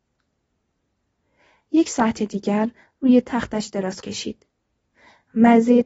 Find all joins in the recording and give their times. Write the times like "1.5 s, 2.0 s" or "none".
4.0 s